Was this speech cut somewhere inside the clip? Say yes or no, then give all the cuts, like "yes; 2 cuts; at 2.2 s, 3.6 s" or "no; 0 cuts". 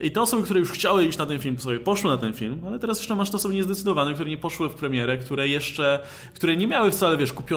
no; 0 cuts